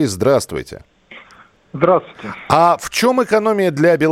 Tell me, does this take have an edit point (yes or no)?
no